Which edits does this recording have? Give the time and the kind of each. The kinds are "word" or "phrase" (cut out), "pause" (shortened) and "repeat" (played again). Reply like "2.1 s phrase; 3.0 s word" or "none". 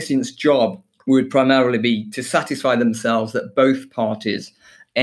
none